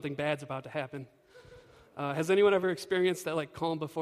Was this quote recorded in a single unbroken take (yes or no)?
yes